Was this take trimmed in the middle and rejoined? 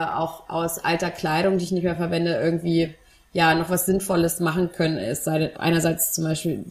yes; 1 cut; at 5.5 s

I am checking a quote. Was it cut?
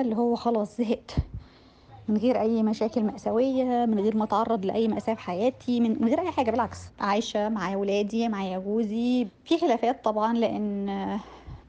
no; 0 cuts

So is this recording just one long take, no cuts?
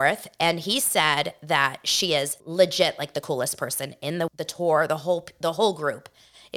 no; 2 cuts; at 2.4 s, 4.3 s

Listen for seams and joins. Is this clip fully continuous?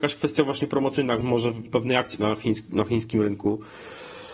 no; 3 cuts; at 1.2 s, 1.7 s, 2.2 s

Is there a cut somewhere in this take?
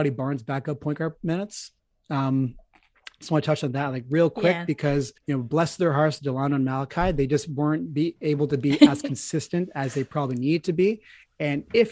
yes; 1 cut; at 5.2 s

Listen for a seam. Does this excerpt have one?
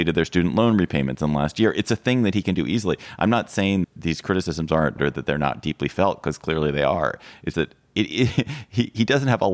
yes; 3 cuts; at 3.8 s, 5.0 s, 7.5 s

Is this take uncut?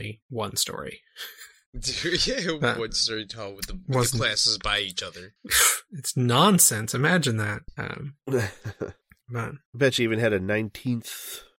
yes; 0 cuts

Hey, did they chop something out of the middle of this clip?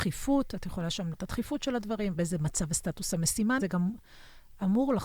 yes; 3 cuts; at 1.1 s, 2.1 s, 3.6 s

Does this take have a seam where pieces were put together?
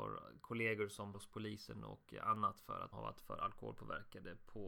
yes; 2 cuts; at 1.1 s, 2.9 s

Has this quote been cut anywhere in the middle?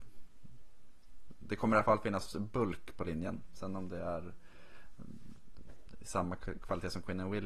no; 0 cuts

